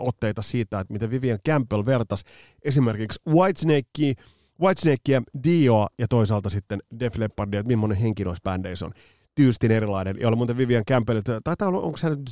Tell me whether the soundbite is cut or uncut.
uncut